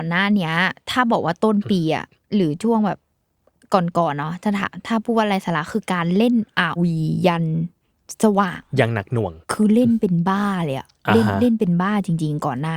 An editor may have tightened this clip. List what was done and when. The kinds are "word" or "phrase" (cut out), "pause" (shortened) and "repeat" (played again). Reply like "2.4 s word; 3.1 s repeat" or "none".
6.8 s word; 9.4 s pause